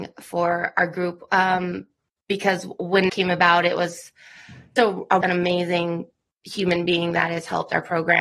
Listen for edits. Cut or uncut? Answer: cut